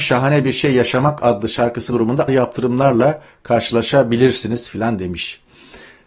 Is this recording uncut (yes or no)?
no